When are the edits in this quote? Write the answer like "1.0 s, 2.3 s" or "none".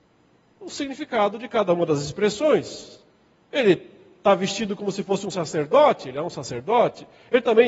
none

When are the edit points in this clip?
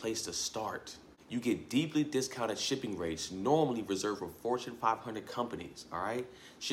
none

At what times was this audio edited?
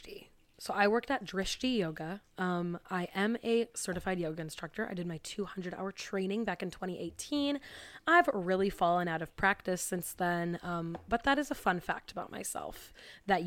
2.3 s

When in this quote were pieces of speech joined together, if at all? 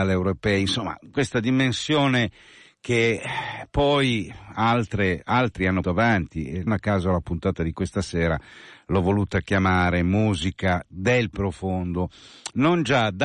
5.8 s, 6.7 s

